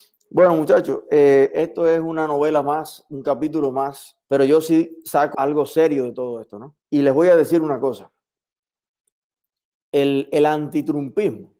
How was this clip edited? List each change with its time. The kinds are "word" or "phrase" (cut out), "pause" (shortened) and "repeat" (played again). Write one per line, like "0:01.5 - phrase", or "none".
0:04.2 - word
0:05.3 - word
0:06.8 - pause